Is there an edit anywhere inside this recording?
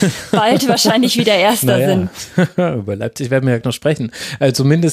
yes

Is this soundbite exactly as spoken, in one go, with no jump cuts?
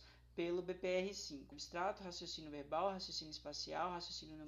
no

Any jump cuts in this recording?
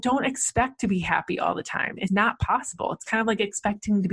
yes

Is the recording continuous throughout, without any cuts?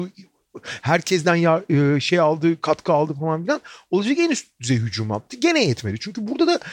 yes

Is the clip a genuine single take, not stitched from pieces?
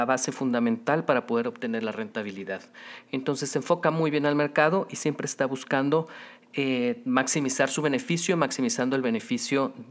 yes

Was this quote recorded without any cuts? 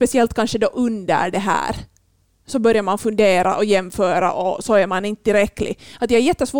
yes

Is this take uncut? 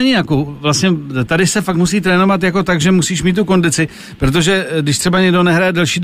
yes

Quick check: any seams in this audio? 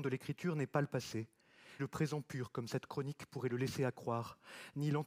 yes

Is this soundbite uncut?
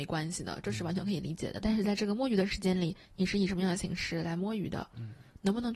no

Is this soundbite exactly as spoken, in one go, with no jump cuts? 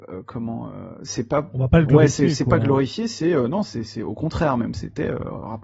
yes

